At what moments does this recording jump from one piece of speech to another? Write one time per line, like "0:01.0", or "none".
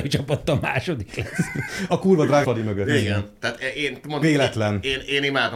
0:01.9
0:02.4
0:04.2